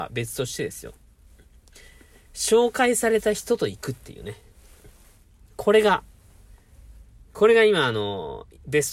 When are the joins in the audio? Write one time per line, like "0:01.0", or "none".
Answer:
none